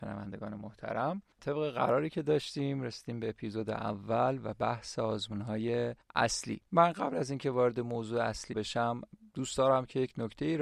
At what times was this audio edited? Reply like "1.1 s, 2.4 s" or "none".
6.7 s, 8.5 s

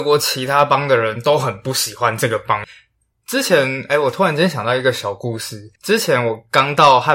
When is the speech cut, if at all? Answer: 5.8 s

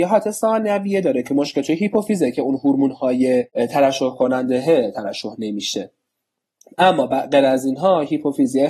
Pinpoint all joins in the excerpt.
none

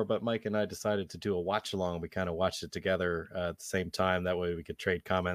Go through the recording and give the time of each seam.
none

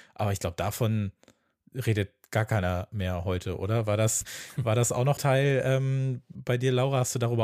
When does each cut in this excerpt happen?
4.2 s, 5.2 s

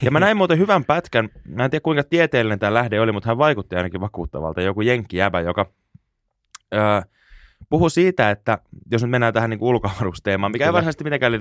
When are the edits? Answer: none

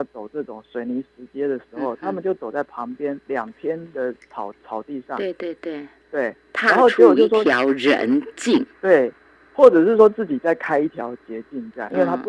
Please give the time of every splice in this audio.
6.0 s, 8.7 s

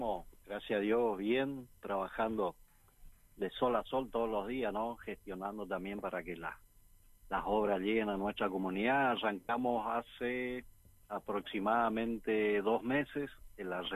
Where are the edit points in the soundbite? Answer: none

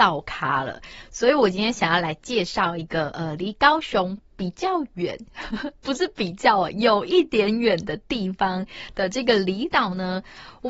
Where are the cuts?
none

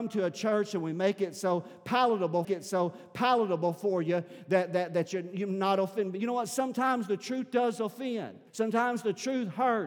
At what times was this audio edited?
2.4 s, 8.5 s

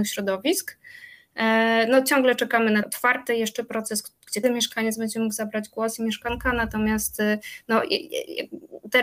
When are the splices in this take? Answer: 2.8 s, 4.4 s

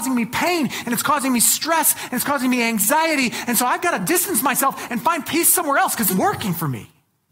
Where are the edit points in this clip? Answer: 6.1 s

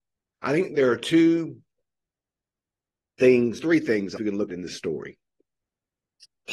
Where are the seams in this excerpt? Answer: 3.6 s, 4.2 s, 4.5 s

